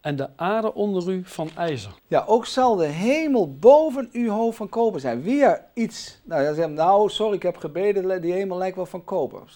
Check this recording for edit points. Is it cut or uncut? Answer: cut